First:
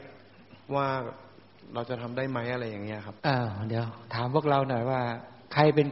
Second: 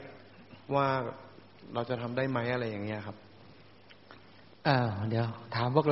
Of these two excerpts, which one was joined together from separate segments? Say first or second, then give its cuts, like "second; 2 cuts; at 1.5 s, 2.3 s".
first; 1 cut; at 3.2 s